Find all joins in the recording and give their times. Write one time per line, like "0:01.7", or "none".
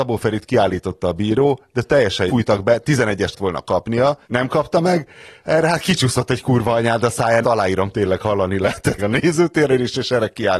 0:02.3
0:03.3
0:04.2
0:07.4
0:09.0